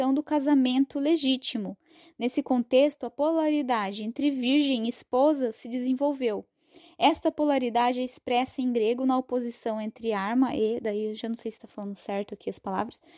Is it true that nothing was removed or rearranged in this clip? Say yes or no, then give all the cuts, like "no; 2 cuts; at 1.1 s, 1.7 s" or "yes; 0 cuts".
yes; 0 cuts